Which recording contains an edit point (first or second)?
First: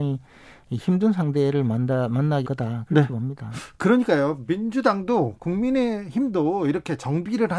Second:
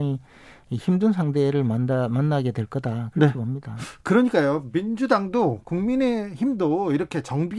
first